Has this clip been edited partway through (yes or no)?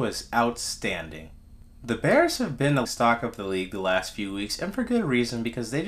yes